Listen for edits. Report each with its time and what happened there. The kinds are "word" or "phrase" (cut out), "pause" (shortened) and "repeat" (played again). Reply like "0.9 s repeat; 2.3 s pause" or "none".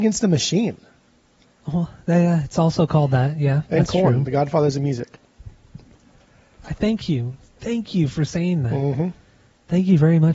3.7 s pause